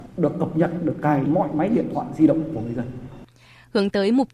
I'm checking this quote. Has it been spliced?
yes; 1 cut; at 1.3 s

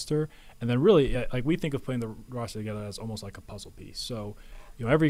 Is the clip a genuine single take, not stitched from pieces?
yes; 0 cuts

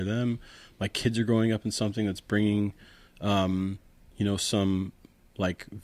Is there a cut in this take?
no; 0 cuts

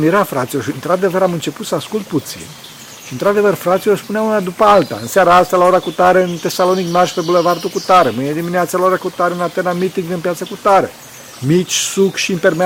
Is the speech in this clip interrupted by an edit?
no; 0 cuts

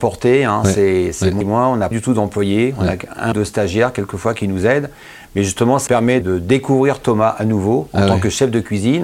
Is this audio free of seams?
no; 5 cuts; at 1.4 s, 1.9 s, 3.3 s, 5.9 s, 6.2 s

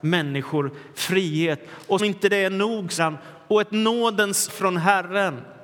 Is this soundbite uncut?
no; 3 cuts; at 2.0 s, 3.0 s, 4.5 s

